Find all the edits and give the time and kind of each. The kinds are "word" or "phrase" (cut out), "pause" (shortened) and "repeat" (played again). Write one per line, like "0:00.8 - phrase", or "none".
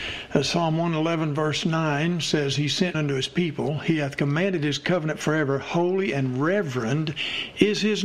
0:02.9 - word